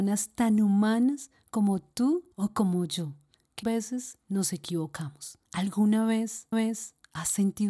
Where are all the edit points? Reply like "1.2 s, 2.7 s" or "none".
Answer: 2.3 s, 3.6 s, 5.4 s, 6.5 s